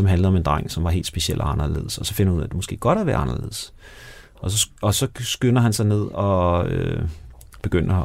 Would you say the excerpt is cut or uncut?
cut